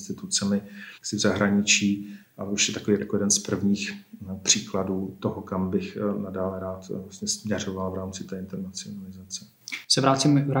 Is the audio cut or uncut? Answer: cut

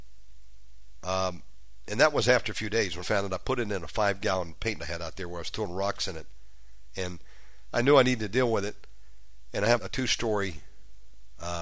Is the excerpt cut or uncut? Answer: cut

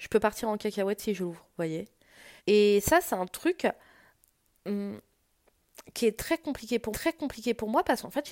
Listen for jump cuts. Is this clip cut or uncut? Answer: cut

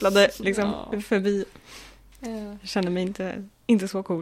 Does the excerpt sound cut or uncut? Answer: uncut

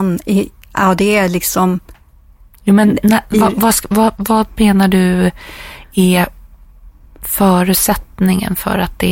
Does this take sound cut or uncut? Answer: uncut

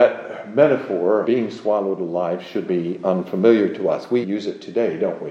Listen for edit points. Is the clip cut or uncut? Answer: cut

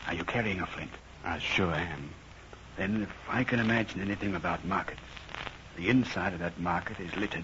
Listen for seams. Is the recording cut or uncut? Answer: uncut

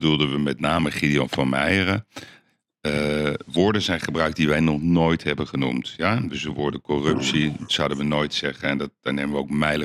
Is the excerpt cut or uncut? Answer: uncut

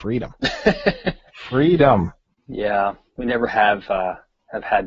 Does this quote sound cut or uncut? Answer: cut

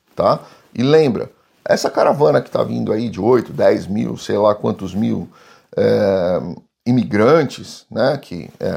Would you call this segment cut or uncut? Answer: uncut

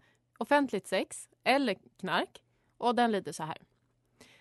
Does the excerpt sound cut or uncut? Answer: uncut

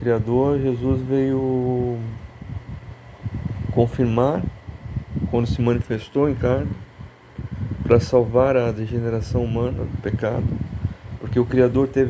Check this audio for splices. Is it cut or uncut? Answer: uncut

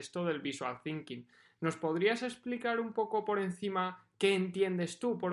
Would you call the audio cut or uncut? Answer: uncut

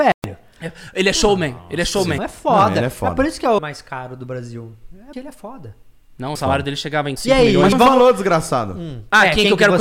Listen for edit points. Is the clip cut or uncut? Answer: cut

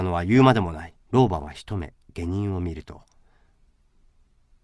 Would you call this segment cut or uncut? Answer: cut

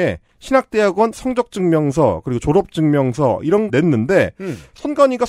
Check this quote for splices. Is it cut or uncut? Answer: cut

